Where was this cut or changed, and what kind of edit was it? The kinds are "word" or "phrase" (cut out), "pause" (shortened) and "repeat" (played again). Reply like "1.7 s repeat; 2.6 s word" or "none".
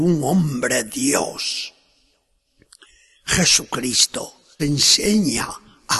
4.6 s word